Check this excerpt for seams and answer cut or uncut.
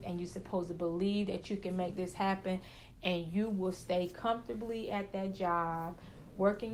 uncut